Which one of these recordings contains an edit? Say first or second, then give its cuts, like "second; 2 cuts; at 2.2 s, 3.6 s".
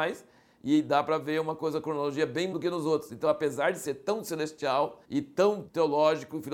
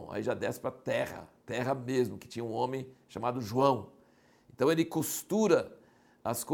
first; 2 cuts; at 2.5 s, 5.0 s